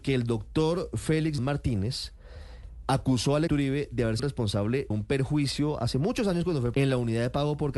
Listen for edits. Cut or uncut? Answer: cut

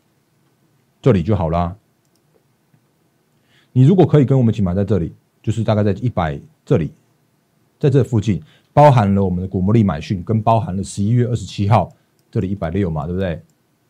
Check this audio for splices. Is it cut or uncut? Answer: uncut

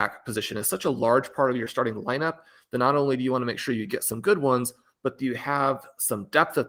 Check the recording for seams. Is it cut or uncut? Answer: uncut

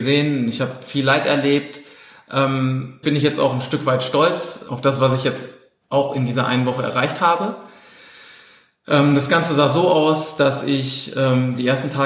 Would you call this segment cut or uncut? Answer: cut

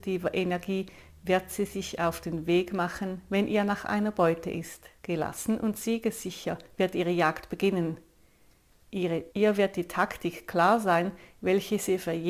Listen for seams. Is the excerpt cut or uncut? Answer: cut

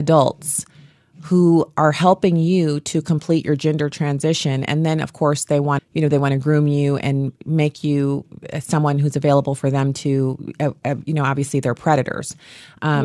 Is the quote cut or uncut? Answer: cut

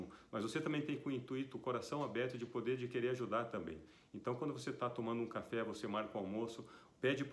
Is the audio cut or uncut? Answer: uncut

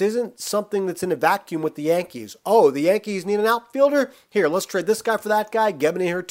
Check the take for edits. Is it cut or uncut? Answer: uncut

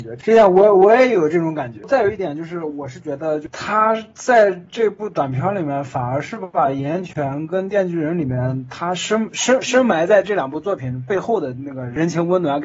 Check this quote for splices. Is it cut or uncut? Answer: uncut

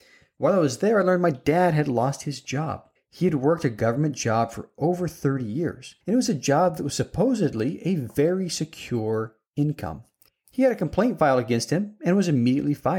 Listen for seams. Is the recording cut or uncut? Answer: cut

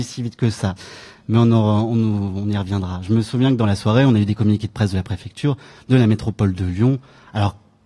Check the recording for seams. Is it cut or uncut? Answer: uncut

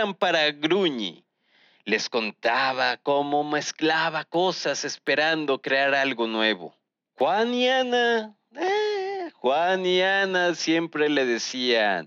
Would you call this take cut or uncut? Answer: uncut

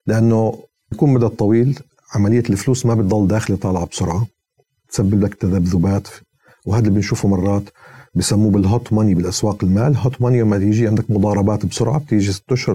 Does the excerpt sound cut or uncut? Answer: cut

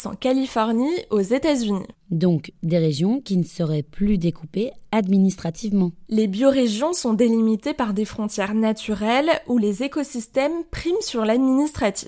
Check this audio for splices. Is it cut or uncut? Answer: uncut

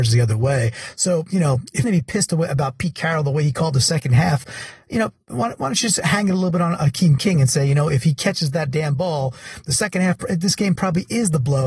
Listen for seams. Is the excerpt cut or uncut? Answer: cut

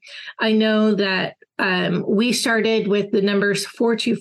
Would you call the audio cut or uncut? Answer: uncut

